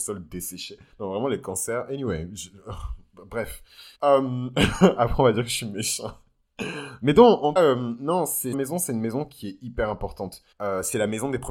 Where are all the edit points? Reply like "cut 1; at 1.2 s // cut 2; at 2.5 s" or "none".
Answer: cut 1; at 0.9 s // cut 2; at 3.9 s // cut 3; at 7.6 s // cut 4; at 8.5 s // cut 5; at 10.5 s